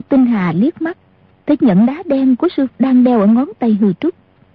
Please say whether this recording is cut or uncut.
cut